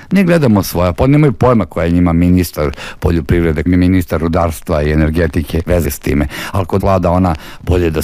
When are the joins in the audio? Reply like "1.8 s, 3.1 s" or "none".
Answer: 0.9 s, 3.7 s, 5.8 s, 6.8 s